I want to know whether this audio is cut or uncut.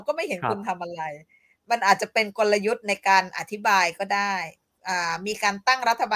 uncut